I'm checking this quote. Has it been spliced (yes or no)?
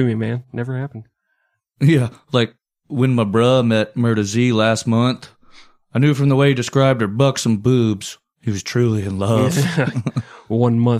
no